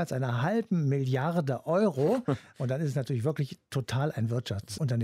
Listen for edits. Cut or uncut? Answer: uncut